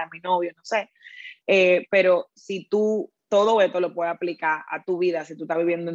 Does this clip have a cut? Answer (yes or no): no